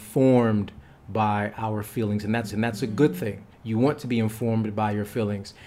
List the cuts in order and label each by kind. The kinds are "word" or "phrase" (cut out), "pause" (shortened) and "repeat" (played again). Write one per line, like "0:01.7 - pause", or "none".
0:02.5 - repeat
0:03.5 - pause